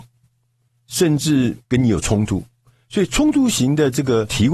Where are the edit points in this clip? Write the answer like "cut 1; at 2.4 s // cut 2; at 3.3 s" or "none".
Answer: cut 1; at 1.6 s